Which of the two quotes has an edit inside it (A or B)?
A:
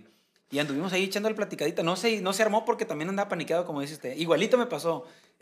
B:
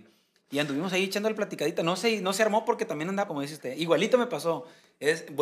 B